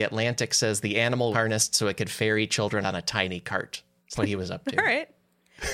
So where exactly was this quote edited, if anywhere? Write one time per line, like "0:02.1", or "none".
0:01.3
0:02.8
0:04.2